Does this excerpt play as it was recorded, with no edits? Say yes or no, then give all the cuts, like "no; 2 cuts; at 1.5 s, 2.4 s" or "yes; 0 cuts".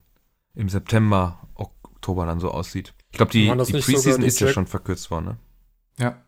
no; 1 cut; at 3.0 s